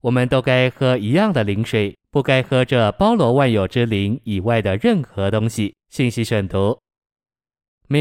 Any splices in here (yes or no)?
yes